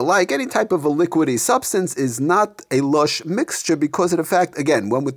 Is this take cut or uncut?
uncut